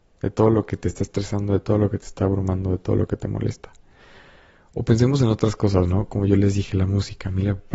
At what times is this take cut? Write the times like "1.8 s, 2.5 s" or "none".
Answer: none